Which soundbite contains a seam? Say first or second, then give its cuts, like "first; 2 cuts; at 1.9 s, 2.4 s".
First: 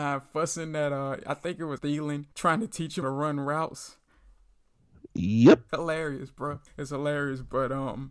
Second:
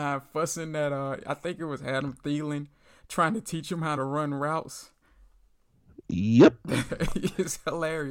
first; 5 cuts; at 1.8 s, 2.3 s, 3.0 s, 5.7 s, 6.7 s